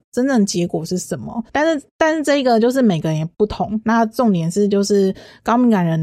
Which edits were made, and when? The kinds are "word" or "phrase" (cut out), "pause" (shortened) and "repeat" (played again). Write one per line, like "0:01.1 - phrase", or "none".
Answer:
0:01.5 - pause